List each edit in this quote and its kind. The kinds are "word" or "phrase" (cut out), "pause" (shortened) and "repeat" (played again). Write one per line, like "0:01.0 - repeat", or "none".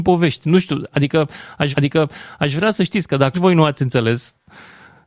0:01.7 - repeat
0:03.3 - word